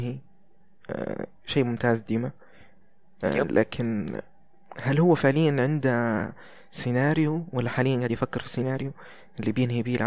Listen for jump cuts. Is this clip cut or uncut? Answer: uncut